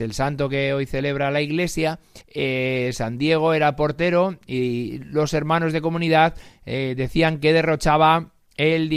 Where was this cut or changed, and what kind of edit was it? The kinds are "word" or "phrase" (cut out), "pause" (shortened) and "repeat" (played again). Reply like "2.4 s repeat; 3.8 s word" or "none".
2.2 s pause